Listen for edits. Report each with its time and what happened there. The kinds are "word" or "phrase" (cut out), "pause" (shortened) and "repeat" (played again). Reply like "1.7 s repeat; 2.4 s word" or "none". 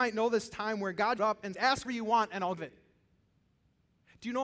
1.2 s word; 1.5 s word; 1.8 s word; 2.6 s word